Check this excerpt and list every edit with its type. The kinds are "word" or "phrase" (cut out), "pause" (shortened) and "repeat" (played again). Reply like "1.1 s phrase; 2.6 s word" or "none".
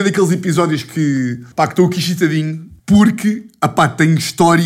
1.5 s pause; 2.8 s pause